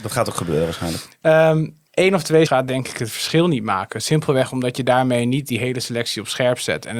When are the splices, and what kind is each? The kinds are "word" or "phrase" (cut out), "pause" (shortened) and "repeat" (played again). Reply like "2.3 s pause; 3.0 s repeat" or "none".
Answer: 1.9 s pause; 2.5 s word